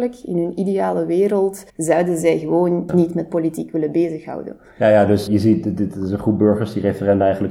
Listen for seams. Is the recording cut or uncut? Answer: cut